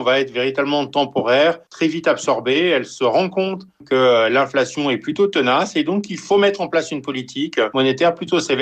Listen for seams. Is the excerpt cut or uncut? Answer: cut